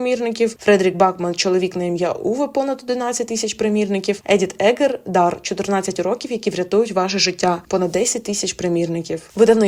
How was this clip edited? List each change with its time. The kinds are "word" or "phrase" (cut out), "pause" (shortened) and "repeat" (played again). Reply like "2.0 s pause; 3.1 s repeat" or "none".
none